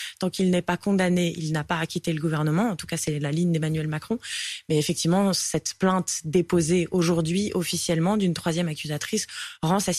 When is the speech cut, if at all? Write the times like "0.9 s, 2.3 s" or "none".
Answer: none